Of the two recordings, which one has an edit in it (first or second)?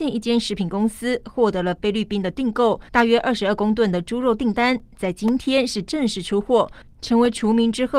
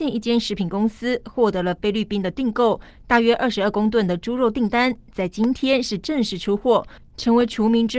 first